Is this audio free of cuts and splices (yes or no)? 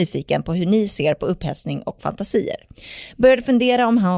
yes